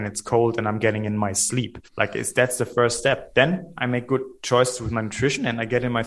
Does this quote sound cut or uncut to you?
cut